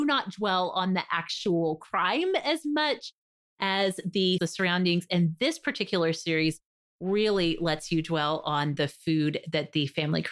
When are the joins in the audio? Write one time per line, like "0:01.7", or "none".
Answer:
0:04.4